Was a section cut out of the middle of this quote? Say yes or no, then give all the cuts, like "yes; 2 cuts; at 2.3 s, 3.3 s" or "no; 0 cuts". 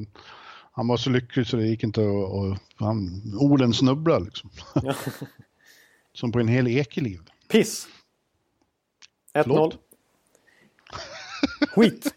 no; 0 cuts